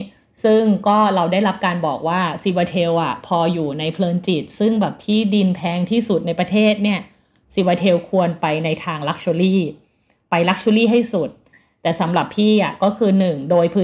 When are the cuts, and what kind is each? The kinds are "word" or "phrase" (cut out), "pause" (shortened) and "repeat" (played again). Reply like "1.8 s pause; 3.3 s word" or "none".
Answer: none